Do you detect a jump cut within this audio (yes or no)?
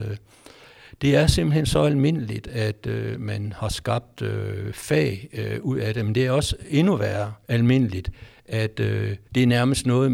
yes